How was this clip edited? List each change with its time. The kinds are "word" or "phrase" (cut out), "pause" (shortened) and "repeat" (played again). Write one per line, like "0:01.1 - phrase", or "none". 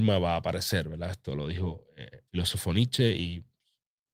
0:02.3 - pause